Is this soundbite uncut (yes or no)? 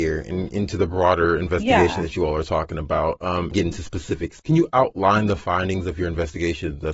yes